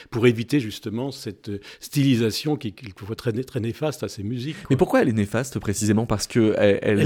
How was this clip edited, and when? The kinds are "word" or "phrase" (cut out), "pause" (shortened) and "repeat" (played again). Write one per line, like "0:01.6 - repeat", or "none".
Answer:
none